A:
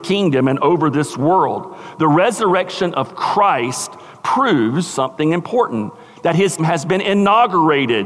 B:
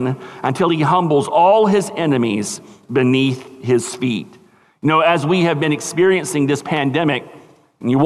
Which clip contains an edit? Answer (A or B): A